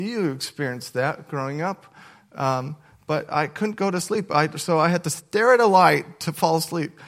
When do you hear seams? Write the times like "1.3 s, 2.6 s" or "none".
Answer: none